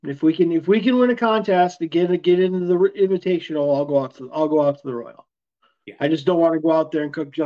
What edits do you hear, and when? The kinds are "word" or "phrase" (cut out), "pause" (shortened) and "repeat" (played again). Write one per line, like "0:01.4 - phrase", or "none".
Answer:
none